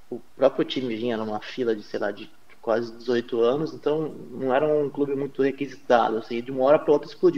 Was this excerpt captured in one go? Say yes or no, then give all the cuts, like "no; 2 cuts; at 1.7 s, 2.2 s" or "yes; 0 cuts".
yes; 0 cuts